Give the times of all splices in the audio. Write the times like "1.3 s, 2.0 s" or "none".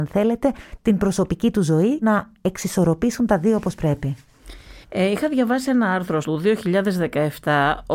2.0 s, 4.8 s, 6.2 s